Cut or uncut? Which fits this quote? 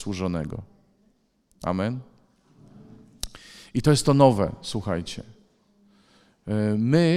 uncut